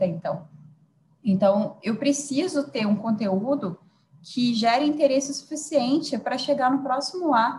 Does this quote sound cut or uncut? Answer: uncut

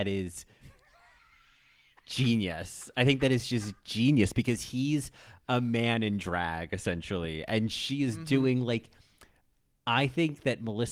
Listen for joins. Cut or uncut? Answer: uncut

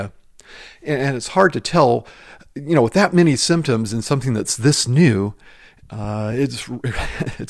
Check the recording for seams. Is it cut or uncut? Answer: uncut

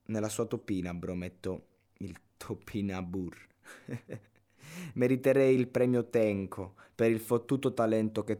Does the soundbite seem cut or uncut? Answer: uncut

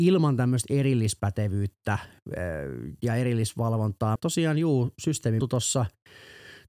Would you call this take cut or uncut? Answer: cut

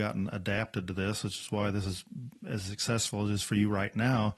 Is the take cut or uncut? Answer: uncut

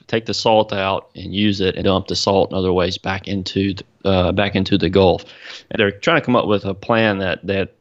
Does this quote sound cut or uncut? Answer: cut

